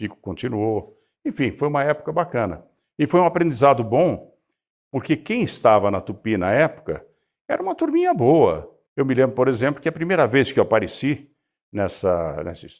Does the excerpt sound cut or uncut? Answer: cut